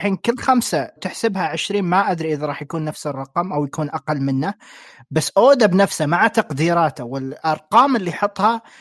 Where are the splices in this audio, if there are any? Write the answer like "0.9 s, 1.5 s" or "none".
1.0 s